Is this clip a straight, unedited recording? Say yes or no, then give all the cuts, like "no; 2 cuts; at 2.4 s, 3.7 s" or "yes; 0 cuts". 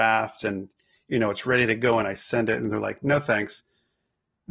yes; 0 cuts